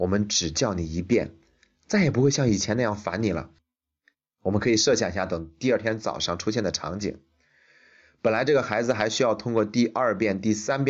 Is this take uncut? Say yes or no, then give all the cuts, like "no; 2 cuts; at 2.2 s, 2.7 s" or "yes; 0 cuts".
yes; 0 cuts